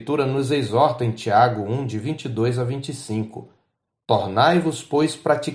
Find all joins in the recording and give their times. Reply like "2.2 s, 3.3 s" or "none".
none